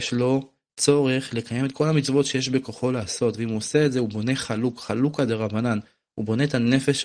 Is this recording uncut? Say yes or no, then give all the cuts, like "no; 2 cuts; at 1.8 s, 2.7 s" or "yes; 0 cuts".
yes; 0 cuts